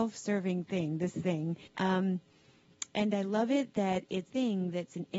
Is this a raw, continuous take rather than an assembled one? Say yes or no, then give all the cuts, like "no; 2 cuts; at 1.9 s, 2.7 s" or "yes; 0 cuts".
no; 2 cuts; at 1.7 s, 4.3 s